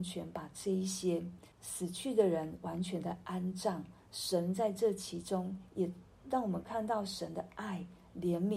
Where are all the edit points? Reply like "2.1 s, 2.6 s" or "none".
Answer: 1.5 s